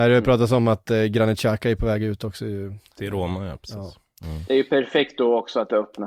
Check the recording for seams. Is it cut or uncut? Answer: uncut